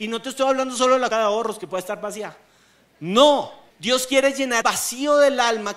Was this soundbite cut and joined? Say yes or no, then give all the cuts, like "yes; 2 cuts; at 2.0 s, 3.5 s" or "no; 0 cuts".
yes; 3 cuts; at 1.1 s, 3.7 s, 4.6 s